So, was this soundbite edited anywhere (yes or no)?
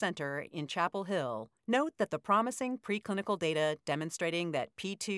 yes